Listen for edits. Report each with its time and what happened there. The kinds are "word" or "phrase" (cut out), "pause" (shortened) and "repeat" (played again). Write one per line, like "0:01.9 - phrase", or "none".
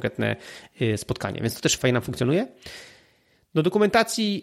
0:01.8 - word

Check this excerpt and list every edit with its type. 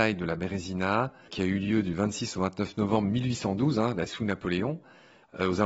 0:01.3 - word
0:04.1 - word

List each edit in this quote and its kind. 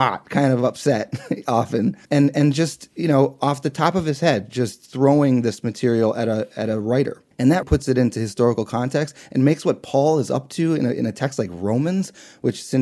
0:02.0 - pause
0:07.3 - pause
0:07.6 - word

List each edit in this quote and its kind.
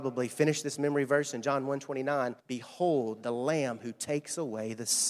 0:02.4 - pause

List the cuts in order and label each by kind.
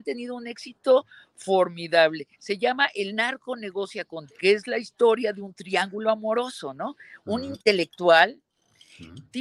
0:04.3 - word

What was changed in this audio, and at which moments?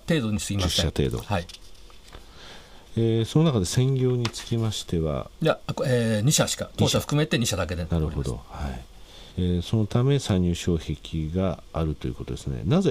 0:05.3 - pause
0:09.3 - pause

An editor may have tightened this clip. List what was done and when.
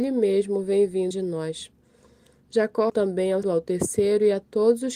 0:01.1 - word
0:02.9 - word
0:03.4 - word

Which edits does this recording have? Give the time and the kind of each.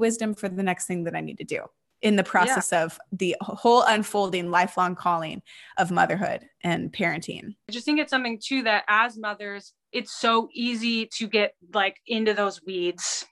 0:09.8 - pause

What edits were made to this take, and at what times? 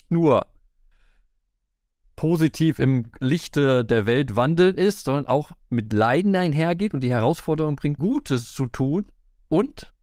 0:08.0 - word

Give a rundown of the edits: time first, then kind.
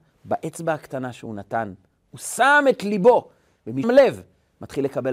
0:03.8 - word

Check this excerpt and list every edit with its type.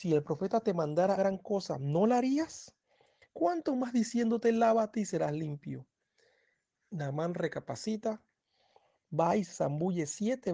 0:01.2 - word

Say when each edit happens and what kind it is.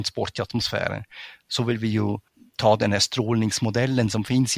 0:02.3 - pause

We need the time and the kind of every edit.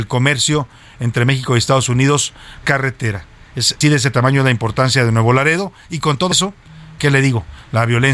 0:02.6 - word
0:03.8 - word
0:06.3 - word
0:07.0 - word

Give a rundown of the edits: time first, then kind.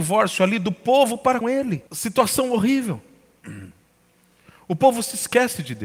0:01.4 - word
0:01.9 - pause

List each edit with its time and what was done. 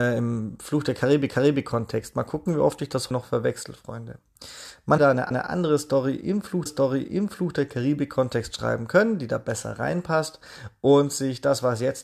0:01.3 - repeat
0:03.1 - word
0:05.0 - word
0:05.3 - repeat
0:06.7 - repeat

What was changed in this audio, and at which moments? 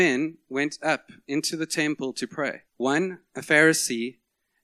0:02.7 - pause

